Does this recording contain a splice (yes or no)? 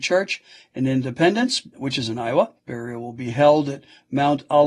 yes